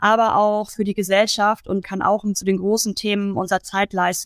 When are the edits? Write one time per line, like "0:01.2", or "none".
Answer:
0:01.8
0:02.3